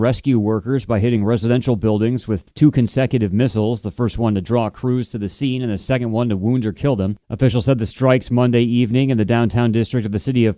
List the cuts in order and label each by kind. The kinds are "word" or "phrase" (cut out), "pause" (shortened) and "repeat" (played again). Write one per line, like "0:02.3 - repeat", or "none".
0:02.5 - pause
0:07.2 - pause